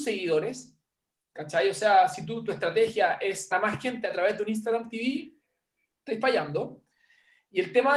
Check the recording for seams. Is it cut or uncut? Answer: cut